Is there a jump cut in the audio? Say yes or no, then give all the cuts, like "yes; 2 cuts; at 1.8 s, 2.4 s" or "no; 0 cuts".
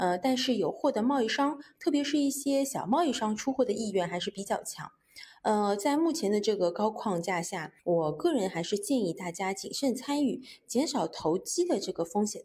yes; 1 cut; at 7.8 s